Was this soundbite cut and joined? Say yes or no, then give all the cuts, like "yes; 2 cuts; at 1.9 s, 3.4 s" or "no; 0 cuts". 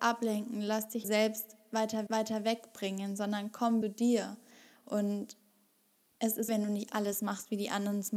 yes; 4 cuts; at 1.0 s, 2.1 s, 3.8 s, 6.5 s